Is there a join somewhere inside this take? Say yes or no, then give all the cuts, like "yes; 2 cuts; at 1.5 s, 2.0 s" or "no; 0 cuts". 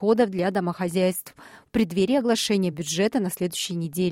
no; 0 cuts